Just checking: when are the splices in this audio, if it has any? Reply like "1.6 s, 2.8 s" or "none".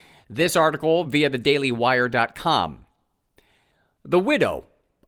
none